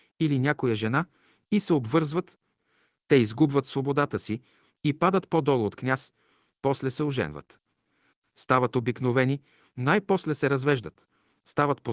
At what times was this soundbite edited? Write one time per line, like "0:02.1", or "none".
none